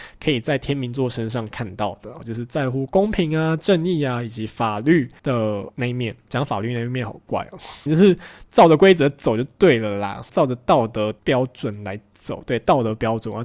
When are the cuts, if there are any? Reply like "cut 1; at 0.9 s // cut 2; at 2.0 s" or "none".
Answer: cut 1; at 2.2 s // cut 2; at 5.7 s // cut 3; at 7.9 s // cut 4; at 10.3 s

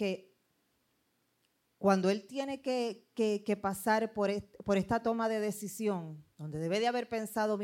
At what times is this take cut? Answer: cut 1; at 6.3 s

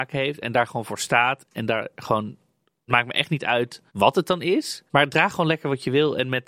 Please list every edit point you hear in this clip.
cut 1; at 2.9 s // cut 2; at 3.9 s // cut 3; at 4.9 s

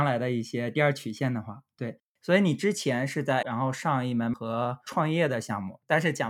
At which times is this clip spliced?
cut 1; at 3.4 s // cut 2; at 4.3 s

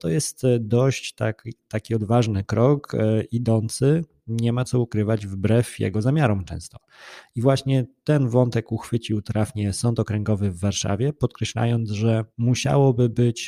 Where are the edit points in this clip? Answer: cut 1; at 12.3 s

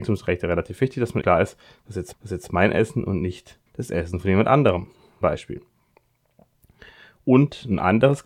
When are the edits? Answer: cut 1; at 1.2 s // cut 2; at 2.1 s // cut 3; at 3.7 s // cut 4; at 5.2 s

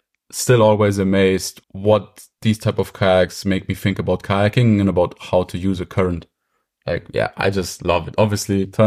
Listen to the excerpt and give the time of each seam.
cut 1; at 1.6 s

